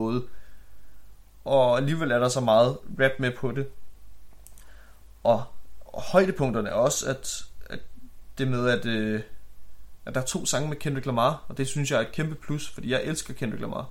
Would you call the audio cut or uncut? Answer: uncut